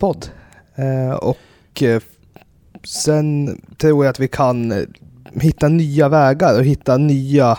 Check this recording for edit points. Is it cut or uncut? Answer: uncut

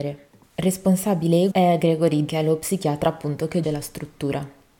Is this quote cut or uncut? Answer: cut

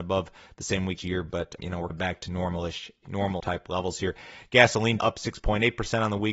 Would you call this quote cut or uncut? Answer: cut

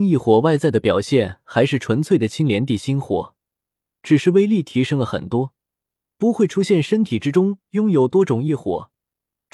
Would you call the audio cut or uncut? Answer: uncut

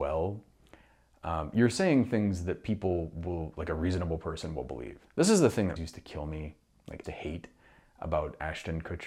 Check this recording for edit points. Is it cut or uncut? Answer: cut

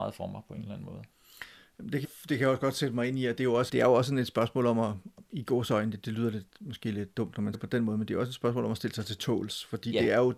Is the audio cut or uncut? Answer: cut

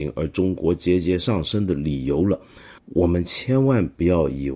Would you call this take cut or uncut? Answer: cut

